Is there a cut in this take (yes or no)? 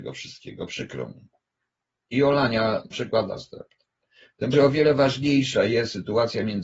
yes